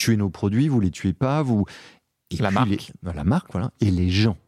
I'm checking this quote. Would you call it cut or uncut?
uncut